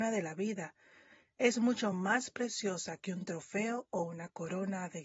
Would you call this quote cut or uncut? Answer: uncut